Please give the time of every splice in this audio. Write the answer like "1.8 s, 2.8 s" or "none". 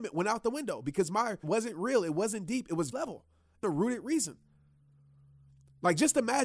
1.4 s, 2.9 s, 3.6 s